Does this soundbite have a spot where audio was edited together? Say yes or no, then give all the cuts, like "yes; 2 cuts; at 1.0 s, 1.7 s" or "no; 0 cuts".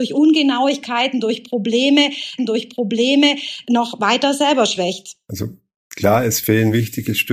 yes; 1 cut; at 2.4 s